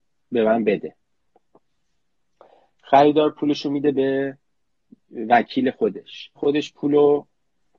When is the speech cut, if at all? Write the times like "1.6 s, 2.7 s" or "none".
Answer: 6.4 s